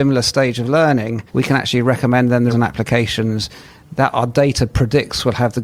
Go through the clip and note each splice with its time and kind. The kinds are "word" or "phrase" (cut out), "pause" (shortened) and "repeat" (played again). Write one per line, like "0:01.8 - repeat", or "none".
0:01.3 - pause
0:02.5 - word